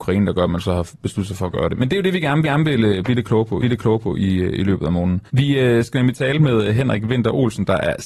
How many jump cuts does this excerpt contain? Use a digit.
3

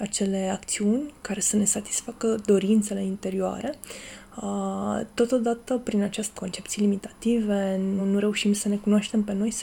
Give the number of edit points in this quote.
2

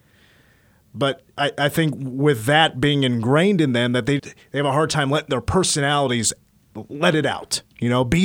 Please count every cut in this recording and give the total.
1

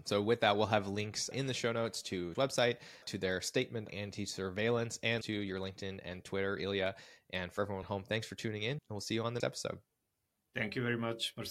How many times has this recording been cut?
8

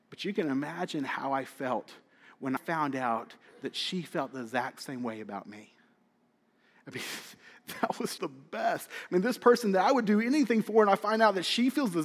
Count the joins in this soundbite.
2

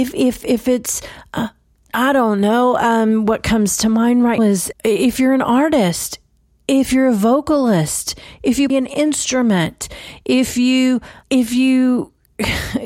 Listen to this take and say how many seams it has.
4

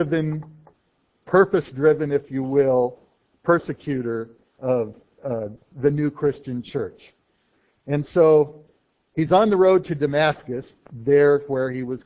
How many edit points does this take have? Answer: 0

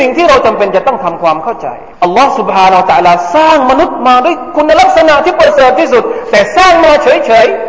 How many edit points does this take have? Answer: 1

